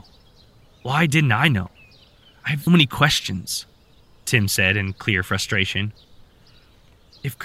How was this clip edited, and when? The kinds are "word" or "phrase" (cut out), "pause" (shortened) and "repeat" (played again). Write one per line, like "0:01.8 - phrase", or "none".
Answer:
0:02.7 - word